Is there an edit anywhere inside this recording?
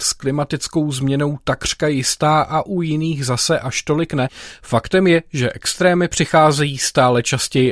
no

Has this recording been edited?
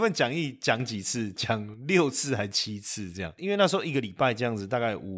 no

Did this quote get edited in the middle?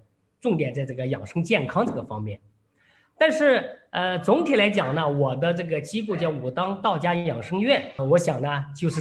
yes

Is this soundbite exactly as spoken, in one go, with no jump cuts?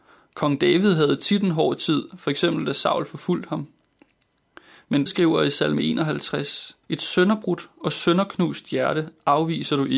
no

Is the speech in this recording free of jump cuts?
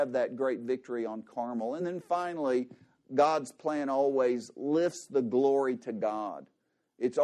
yes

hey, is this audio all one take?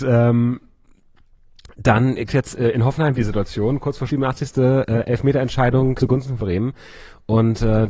no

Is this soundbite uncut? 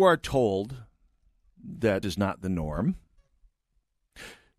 no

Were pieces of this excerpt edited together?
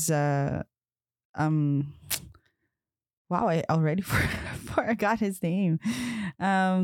no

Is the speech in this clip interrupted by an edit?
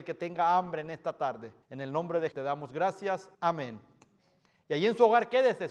yes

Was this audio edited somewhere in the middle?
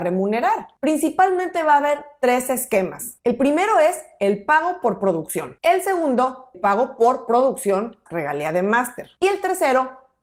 yes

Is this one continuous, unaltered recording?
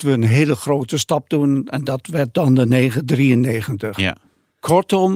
yes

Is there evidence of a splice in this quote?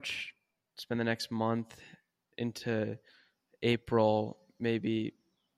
no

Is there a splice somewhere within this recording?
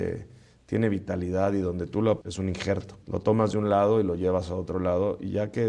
yes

